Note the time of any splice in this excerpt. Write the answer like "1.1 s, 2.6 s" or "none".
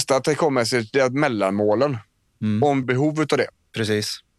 2.8 s